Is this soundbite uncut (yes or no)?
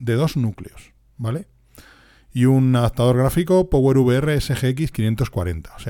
yes